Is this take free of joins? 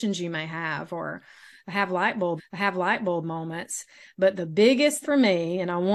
no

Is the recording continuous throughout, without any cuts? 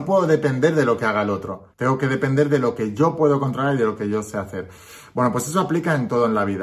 no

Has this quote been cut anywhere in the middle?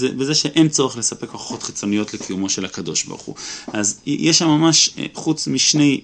no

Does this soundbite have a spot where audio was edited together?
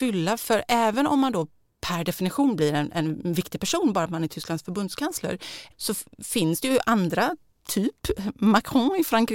no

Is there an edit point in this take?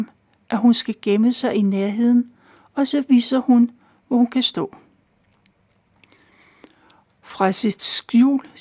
no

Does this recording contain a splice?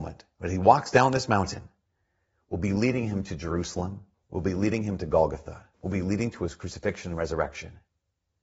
yes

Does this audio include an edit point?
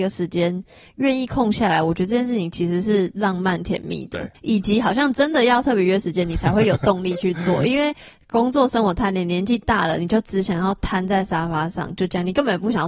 yes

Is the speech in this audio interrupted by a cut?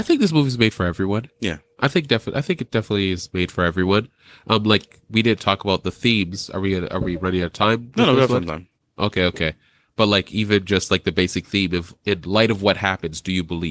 no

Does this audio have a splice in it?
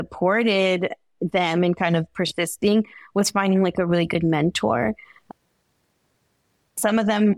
no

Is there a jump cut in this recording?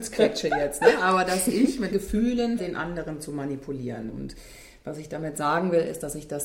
yes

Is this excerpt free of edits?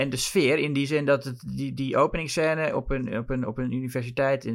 yes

